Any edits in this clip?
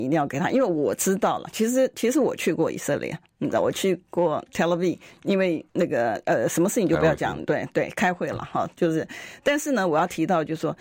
yes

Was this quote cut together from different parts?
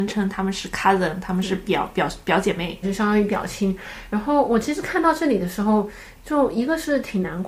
yes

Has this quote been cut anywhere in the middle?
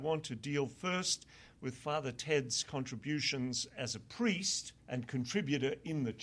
yes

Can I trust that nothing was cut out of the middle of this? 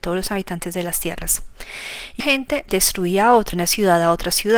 no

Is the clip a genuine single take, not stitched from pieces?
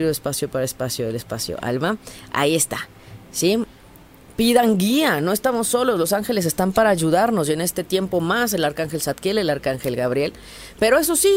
yes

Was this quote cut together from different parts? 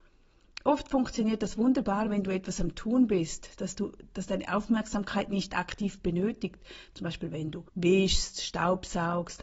yes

